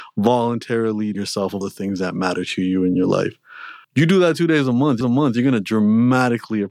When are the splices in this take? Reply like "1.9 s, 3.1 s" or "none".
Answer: 1.1 s, 1.6 s, 3.8 s, 5.0 s

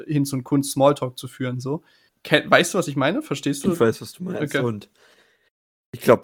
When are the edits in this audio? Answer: none

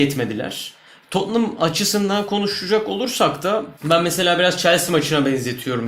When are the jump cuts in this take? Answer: 3.8 s

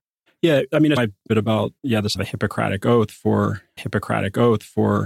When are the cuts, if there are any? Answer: 1.0 s, 1.3 s, 1.8 s, 2.2 s, 3.8 s

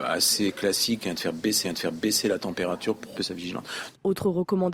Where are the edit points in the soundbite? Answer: 1.6 s, 3.2 s

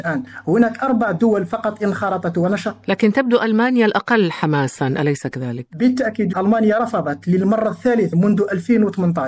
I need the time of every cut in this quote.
6.3 s, 8.1 s

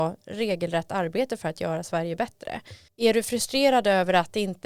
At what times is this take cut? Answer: 2.9 s

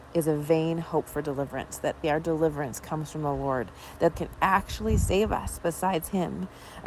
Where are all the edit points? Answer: 2.0 s, 4.1 s

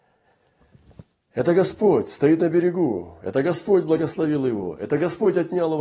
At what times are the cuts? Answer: none

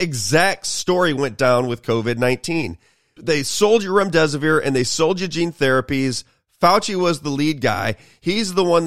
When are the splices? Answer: 3.2 s

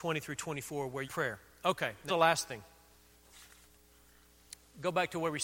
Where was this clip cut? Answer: 1.0 s, 2.1 s

